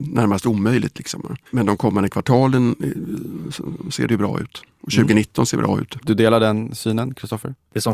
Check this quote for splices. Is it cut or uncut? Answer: cut